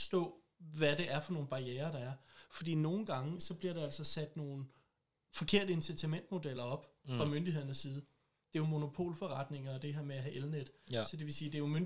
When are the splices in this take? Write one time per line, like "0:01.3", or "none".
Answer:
none